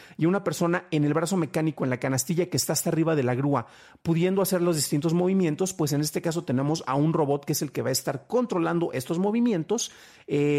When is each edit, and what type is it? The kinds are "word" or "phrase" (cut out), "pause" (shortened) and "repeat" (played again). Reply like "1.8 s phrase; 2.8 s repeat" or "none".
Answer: none